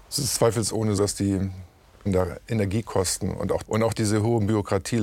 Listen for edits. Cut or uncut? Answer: cut